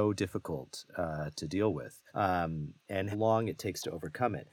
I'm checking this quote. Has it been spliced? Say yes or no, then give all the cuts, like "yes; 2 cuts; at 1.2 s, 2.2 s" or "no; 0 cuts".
yes; 3 cuts; at 1.3 s, 2.1 s, 3.1 s